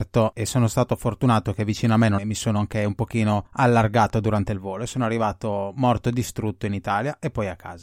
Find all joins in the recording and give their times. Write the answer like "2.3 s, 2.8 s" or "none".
2.2 s